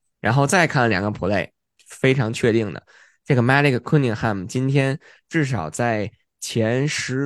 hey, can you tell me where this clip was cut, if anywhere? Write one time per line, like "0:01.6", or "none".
none